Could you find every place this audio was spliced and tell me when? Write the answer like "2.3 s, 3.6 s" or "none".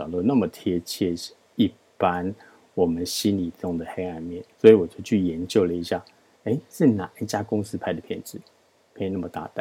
4.5 s